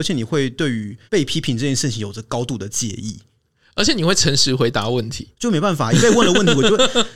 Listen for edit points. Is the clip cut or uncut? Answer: cut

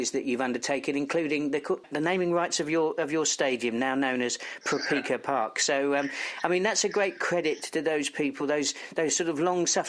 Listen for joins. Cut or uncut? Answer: uncut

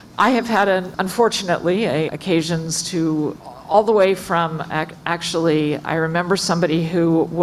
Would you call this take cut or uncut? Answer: uncut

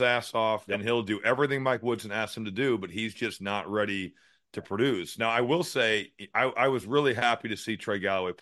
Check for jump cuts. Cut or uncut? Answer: uncut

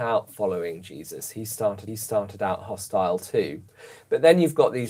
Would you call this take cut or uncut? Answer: cut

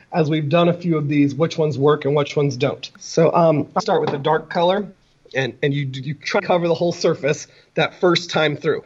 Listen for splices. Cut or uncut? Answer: cut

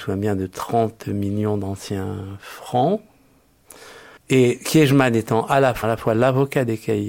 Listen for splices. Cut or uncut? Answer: cut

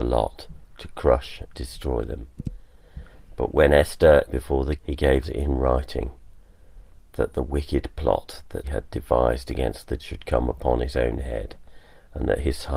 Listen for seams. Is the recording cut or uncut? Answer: cut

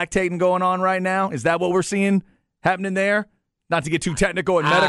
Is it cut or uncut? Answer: uncut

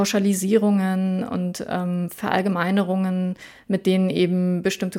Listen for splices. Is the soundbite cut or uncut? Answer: uncut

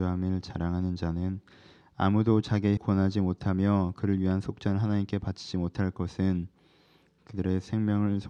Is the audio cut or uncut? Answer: cut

